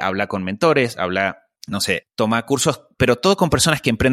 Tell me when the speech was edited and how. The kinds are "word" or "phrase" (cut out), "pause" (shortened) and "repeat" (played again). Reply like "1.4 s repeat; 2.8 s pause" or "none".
1.6 s pause; 2.0 s word